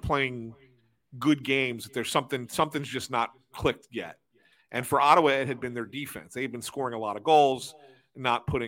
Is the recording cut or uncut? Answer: uncut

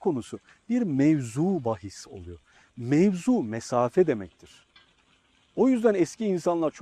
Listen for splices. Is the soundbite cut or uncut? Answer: uncut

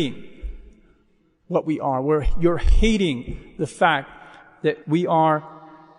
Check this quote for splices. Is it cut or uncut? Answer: cut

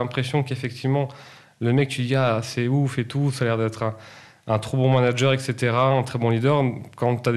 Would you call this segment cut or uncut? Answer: uncut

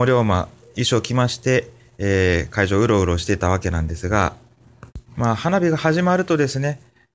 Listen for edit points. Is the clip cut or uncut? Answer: cut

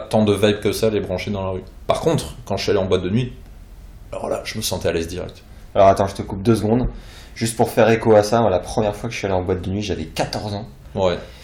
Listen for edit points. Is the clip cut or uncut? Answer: uncut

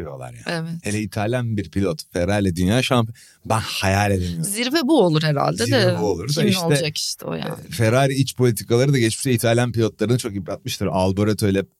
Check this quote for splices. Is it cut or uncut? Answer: uncut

